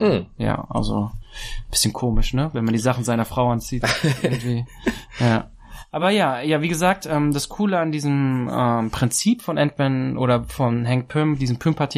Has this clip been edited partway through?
no; 0 cuts

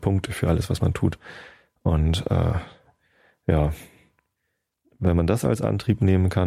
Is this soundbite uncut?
yes; 0 cuts

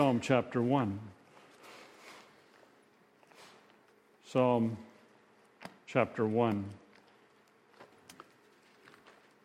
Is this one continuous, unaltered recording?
yes; 0 cuts

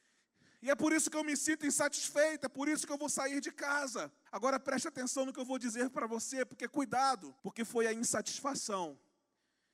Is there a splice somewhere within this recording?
yes; 2 cuts; at 4.3 s, 7.4 s

